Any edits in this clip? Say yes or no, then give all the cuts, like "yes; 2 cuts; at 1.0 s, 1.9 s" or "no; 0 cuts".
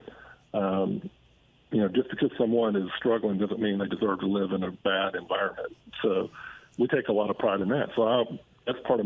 no; 0 cuts